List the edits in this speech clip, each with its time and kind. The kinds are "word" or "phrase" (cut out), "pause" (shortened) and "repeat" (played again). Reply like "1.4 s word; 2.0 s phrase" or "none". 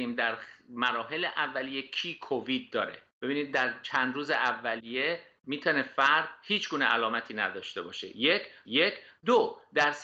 3.1 s pause; 8.6 s repeat